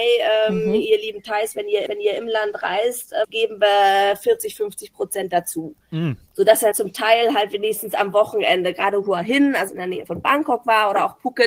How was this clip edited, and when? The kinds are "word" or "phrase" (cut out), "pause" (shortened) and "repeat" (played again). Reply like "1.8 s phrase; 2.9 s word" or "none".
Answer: 1.9 s repeat; 3.2 s word; 6.7 s word; 9.7 s word; 10.1 s word

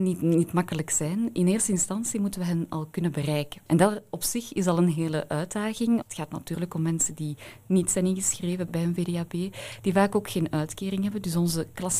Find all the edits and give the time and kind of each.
8.7 s word

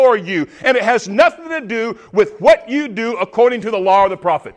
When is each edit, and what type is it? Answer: none

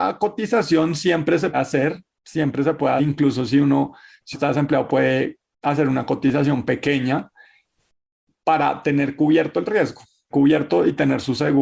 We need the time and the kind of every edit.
1.5 s word; 3.0 s word; 4.3 s word; 10.3 s word

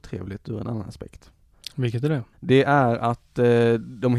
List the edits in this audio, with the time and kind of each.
2.3 s pause

